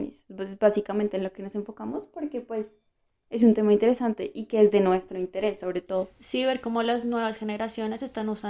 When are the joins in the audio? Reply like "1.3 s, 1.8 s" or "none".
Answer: none